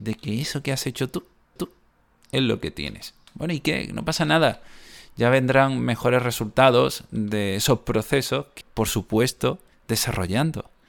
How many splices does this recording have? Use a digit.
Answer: 3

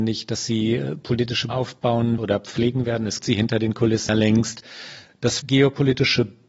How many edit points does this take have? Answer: 5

